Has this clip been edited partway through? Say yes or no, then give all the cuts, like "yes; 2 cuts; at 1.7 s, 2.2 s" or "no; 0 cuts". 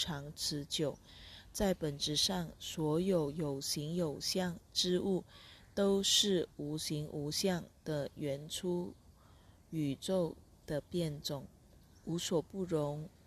no; 0 cuts